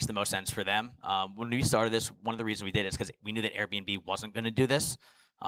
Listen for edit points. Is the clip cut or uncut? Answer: uncut